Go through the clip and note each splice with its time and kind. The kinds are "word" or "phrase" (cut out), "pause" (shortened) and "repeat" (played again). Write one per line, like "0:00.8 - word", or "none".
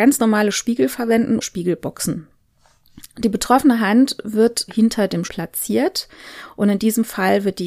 0:01.4 - phrase
0:04.7 - word
0:05.2 - word